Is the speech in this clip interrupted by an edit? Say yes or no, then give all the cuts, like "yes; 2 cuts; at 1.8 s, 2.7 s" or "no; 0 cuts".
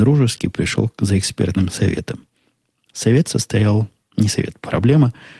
no; 0 cuts